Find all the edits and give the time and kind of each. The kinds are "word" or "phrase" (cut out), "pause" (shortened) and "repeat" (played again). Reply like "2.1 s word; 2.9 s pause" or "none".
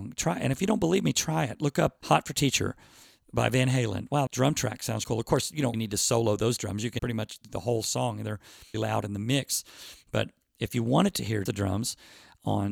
2.0 s word; 4.3 s word; 5.0 s word; 5.7 s word; 7.0 s word; 8.7 s word; 11.5 s word